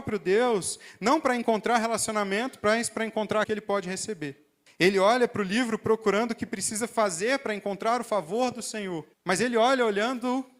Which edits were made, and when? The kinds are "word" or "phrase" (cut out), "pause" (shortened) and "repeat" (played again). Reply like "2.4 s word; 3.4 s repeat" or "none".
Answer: 3.4 s word; 4.7 s pause; 9.1 s pause